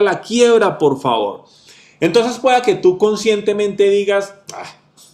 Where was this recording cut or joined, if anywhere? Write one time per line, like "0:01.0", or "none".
none

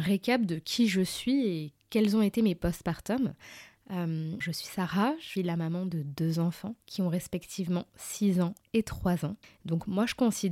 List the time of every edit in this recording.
0:01.8
0:04.4
0:05.4
0:06.8
0:09.4

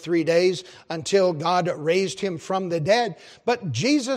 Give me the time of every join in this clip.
none

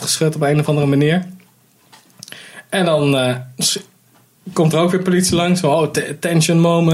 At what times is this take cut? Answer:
none

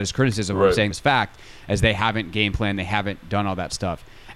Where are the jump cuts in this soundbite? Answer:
0:00.9

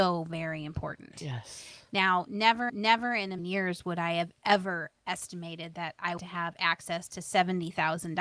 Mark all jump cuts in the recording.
0:02.7
0:03.4
0:06.2

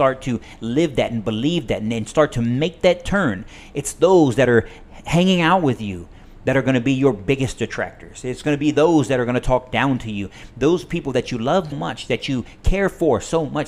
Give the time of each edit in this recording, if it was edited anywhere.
0:11.7

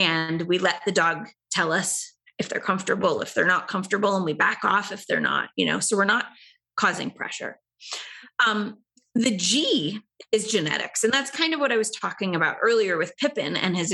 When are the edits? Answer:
none

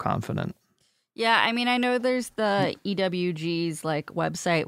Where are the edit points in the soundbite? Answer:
none

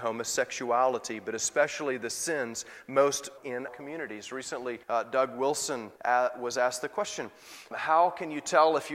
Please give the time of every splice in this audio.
0:03.4
0:03.7
0:04.8
0:06.0
0:07.7

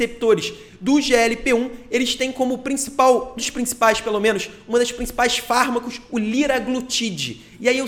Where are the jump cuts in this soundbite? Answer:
0:03.4

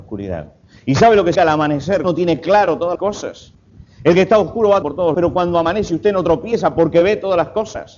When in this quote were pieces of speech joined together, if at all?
0:01.4
0:02.0
0:03.0
0:04.8
0:05.1

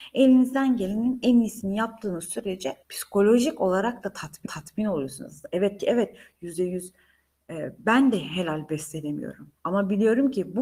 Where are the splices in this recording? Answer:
0:02.8
0:04.5
0:05.8
0:09.6

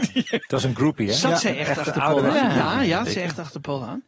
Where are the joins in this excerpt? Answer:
0:03.1

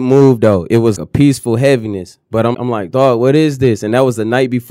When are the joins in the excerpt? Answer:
0:01.0
0:02.5

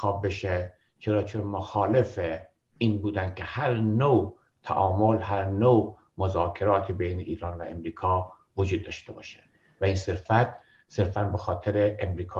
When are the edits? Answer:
none

